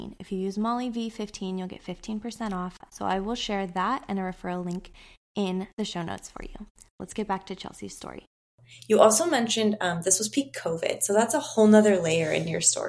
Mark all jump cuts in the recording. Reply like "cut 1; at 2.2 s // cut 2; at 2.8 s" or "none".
none